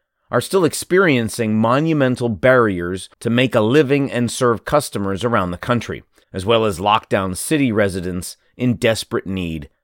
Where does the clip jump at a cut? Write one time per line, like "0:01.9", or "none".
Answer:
0:03.1
0:06.2